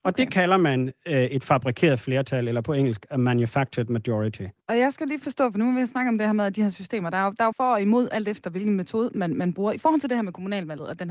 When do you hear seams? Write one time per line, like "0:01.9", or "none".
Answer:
0:04.6
0:07.5